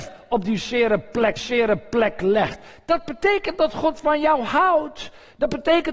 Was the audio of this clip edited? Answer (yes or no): yes